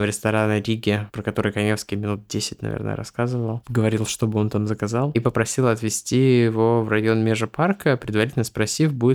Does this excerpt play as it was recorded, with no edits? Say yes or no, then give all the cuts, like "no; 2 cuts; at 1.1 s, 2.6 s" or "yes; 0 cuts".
yes; 0 cuts